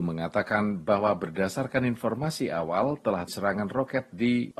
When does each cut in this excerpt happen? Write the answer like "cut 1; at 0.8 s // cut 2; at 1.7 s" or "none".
cut 1; at 3.3 s